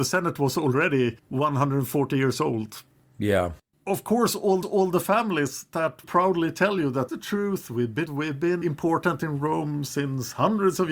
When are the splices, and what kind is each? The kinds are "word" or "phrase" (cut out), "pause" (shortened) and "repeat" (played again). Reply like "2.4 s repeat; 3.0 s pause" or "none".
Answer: 1.2 s pause; 3.7 s pause; 4.6 s repeat; 6.0 s phrase; 7.1 s phrase; 8.1 s word; 8.6 s word